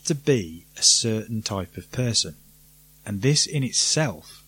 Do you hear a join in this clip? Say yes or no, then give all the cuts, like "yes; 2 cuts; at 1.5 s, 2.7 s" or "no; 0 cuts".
no; 0 cuts